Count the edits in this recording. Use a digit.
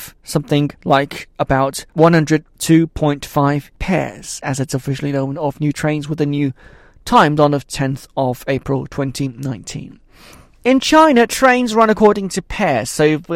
1